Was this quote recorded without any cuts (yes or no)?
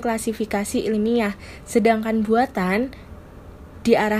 yes